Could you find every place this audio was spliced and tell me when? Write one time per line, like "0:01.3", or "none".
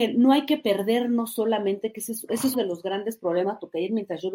0:02.5

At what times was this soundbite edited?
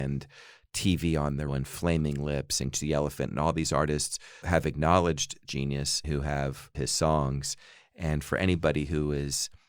0:01.5
0:02.7
0:04.4
0:05.5
0:06.0
0:06.7

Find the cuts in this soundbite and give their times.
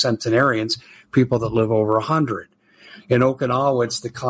none

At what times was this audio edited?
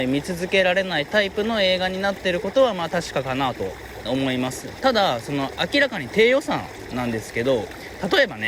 0:04.1

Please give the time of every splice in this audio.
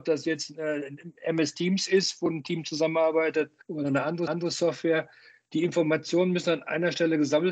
0:03.6
0:04.3

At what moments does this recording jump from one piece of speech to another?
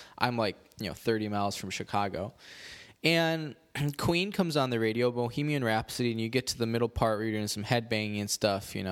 none

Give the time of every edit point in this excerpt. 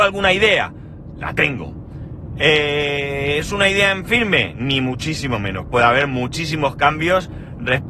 none

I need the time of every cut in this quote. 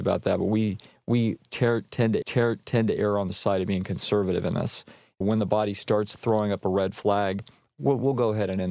0:02.2
0:05.2

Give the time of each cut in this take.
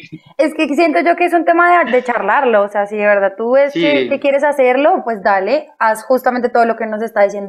none

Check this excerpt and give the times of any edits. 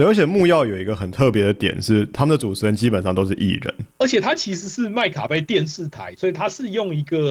0:03.9

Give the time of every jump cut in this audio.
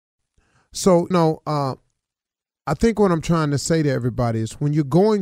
0:01.1

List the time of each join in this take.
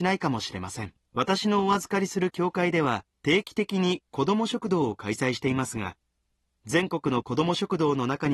0:01.0
0:03.1

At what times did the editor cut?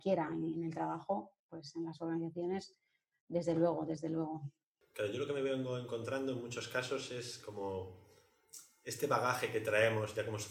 none

